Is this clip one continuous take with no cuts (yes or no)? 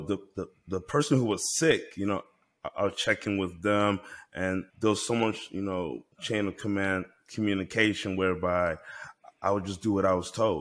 no